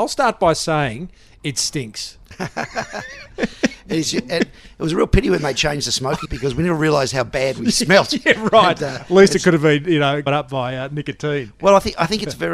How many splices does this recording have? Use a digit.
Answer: 2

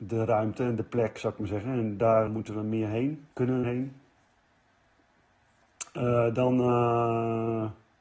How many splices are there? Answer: 3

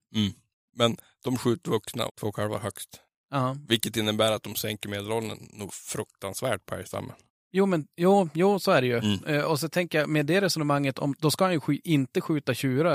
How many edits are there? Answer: 1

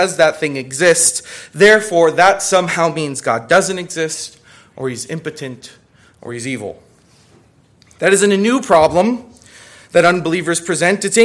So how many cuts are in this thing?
0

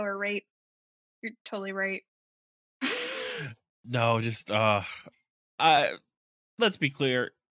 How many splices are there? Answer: 0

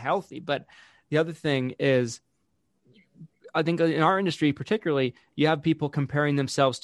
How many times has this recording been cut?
0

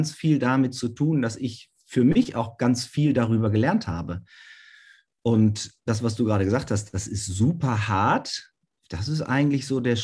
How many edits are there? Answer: 0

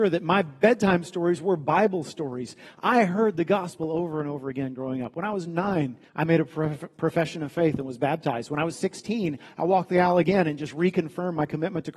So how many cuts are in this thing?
1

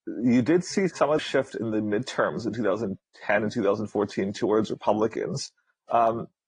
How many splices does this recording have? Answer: 1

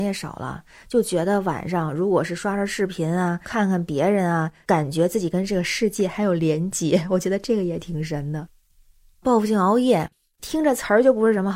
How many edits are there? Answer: 0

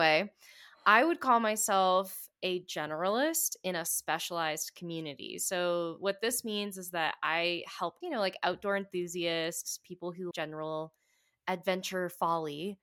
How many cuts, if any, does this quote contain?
2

